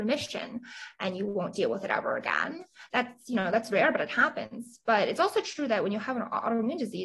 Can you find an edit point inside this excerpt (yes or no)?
no